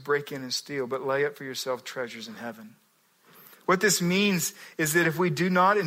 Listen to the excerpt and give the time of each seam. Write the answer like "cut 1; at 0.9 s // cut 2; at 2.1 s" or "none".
none